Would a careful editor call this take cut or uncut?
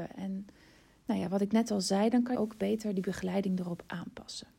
cut